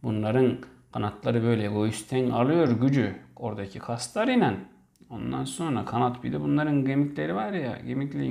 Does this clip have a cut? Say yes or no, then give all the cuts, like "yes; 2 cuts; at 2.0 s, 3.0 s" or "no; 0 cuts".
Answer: no; 0 cuts